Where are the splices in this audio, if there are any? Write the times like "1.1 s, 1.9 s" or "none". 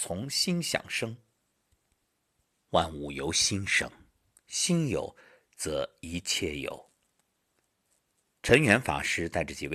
none